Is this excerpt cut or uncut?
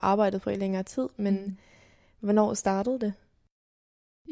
uncut